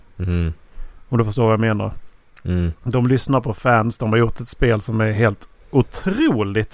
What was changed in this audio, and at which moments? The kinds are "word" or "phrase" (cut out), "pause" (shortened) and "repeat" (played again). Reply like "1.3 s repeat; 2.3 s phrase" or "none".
none